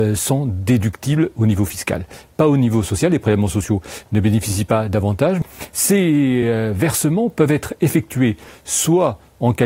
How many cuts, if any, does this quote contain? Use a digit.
0